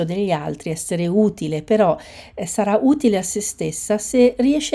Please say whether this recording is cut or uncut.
uncut